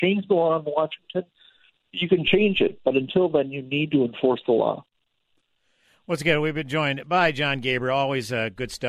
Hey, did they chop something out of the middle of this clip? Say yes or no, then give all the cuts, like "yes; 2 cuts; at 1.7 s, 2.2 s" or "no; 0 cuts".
no; 0 cuts